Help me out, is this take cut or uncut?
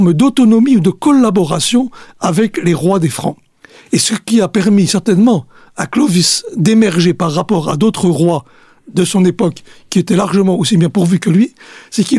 uncut